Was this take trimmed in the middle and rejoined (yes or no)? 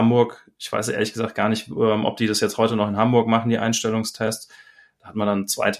no